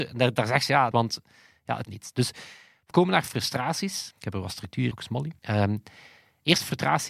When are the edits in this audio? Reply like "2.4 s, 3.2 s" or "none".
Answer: 0.9 s, 1.8 s, 2.9 s, 4.2 s, 4.9 s, 5.4 s